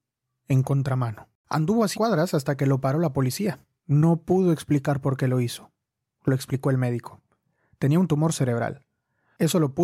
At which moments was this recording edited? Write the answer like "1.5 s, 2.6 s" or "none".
1.4 s, 1.9 s, 3.8 s